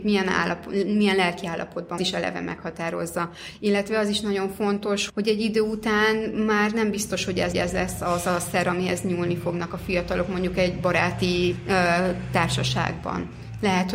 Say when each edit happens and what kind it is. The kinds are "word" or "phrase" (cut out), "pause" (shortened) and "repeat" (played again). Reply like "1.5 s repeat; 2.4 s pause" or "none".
2.0 s phrase; 5.1 s word; 7.5 s repeat